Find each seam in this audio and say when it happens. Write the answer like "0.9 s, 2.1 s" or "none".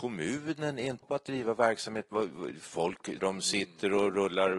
1.0 s, 3.2 s